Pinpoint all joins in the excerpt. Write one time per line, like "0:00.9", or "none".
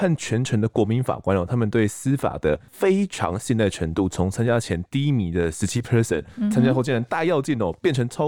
none